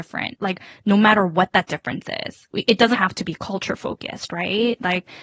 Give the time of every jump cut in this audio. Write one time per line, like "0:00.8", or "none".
0:02.9